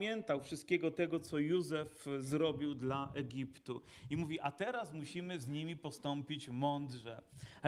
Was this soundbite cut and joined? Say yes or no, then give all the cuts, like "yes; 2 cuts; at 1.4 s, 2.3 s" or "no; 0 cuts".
no; 0 cuts